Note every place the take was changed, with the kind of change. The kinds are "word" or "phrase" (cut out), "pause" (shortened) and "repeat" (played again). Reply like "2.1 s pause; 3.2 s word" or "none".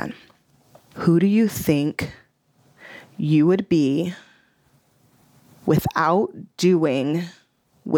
none

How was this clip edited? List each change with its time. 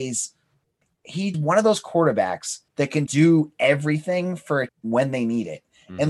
1.3 s phrase; 2.7 s pause; 3.1 s word; 4.7 s word

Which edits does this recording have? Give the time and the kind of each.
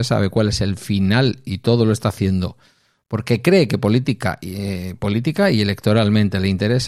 none

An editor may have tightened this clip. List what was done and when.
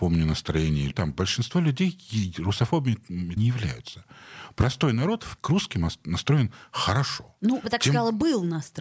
0.9 s word; 3.4 s word; 5.4 s word; 7.6 s word

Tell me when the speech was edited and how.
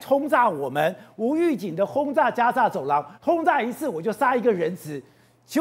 3.1 s pause

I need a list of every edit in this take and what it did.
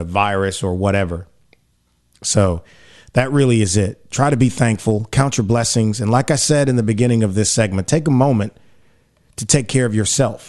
none

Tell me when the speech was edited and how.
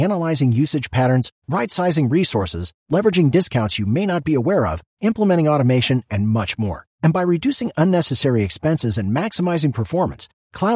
none

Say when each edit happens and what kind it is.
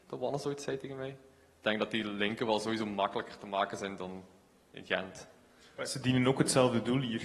none

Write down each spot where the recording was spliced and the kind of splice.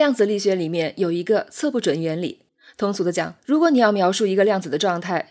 2.5 s pause; 3.4 s pause

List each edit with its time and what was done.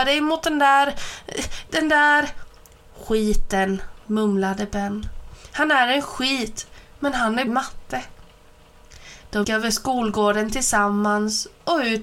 4.0 s pause; 7.5 s word; 9.4 s word

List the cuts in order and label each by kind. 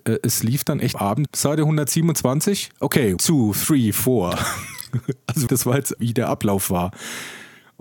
0.9 s word; 1.3 s word; 3.2 s word; 5.5 s word; 6.0 s word

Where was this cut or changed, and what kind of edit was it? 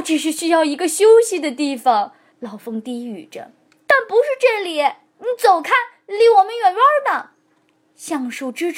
2.3 s pause

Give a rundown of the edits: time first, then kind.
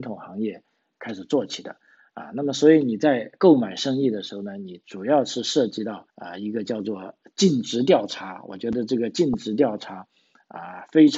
6.1 s pause

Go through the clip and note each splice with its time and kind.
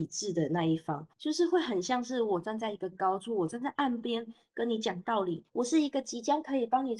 1.1 s pause; 5.5 s pause

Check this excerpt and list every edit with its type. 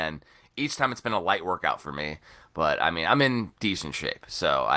none

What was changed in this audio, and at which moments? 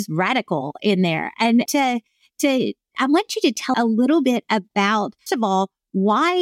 1.7 s phrase; 3.7 s word; 5.3 s word

